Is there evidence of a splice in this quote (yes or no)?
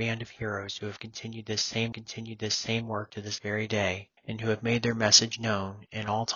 yes